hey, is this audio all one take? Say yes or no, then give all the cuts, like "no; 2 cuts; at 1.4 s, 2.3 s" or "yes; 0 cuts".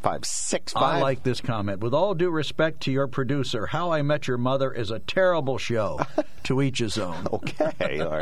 yes; 0 cuts